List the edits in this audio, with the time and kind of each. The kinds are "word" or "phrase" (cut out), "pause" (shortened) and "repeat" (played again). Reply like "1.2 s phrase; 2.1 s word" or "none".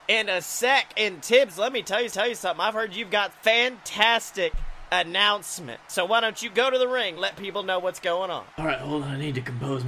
2.1 s repeat; 3.3 s word; 5.8 s pause; 7.2 s word; 8.5 s pause